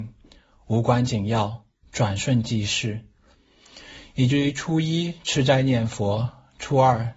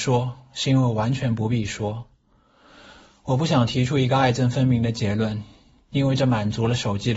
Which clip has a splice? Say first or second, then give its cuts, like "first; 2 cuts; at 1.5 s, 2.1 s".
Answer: first; 1 cut; at 1.8 s